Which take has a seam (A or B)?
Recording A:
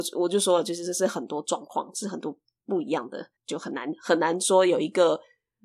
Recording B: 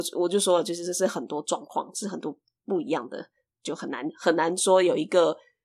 A